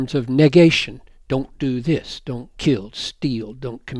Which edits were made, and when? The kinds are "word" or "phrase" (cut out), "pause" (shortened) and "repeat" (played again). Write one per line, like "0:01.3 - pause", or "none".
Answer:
0:02.9 - word